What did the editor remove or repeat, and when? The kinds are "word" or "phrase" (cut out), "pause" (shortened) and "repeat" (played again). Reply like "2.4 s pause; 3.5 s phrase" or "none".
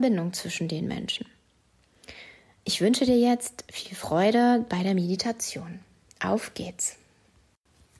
none